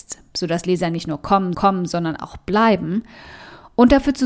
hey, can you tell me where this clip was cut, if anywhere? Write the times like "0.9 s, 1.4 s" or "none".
1.5 s